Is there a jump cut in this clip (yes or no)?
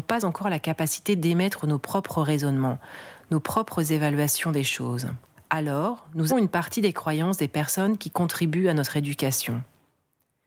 yes